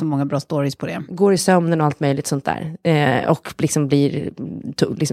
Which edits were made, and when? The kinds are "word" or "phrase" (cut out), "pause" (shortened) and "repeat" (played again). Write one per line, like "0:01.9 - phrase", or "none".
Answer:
none